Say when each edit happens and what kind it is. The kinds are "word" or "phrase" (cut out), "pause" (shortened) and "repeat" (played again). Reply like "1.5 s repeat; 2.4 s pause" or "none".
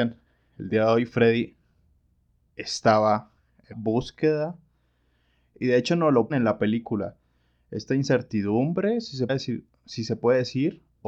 3.7 s word; 6.3 s word; 9.3 s word